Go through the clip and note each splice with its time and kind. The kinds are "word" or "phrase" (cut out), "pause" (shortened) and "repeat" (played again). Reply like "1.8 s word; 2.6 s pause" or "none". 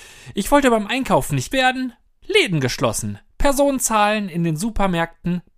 1.5 s word; 2.2 s word